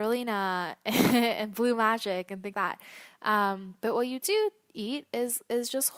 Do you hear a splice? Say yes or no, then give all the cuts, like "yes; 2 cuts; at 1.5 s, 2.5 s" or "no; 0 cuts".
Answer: yes; 1 cut; at 2.5 s